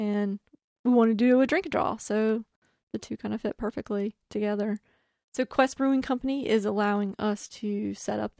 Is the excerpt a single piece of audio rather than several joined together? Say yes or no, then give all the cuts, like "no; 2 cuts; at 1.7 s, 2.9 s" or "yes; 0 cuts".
yes; 0 cuts